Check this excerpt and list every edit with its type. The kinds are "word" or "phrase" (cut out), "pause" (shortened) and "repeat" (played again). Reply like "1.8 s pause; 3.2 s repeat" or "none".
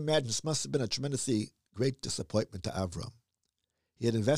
none

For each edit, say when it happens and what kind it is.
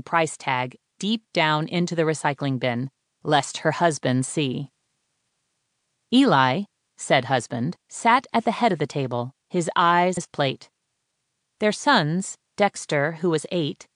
7.8 s pause; 9.4 s pause; 10.2 s word

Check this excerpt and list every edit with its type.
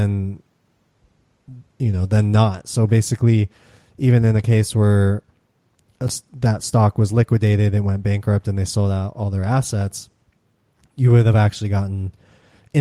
none

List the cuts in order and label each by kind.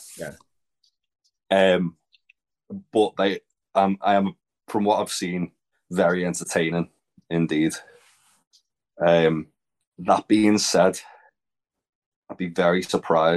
5.7 s pause

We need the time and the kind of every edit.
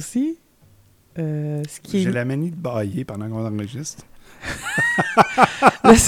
none

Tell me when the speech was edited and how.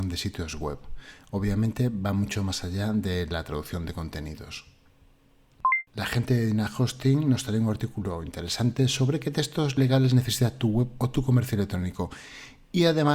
5.9 s pause

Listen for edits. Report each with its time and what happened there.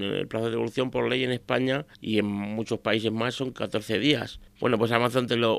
1.9 s pause; 4.5 s pause

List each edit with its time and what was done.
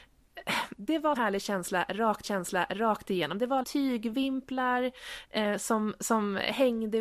1.2 s word; 2.2 s repeat; 3.6 s word

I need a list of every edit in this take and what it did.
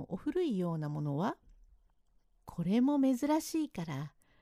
1.9 s pause

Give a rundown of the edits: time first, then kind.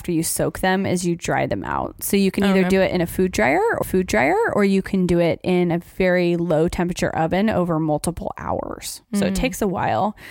3.8 s repeat

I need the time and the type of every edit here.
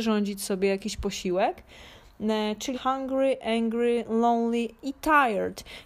2.7 s word

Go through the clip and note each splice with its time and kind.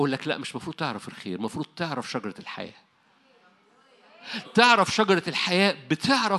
4.4 s word

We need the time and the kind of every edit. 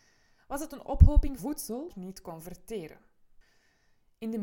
1.4 s word; 1.9 s phrase

